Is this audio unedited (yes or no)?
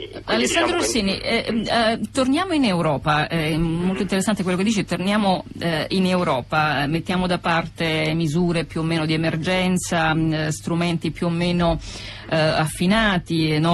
yes